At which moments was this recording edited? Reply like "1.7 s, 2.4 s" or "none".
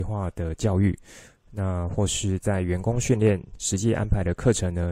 none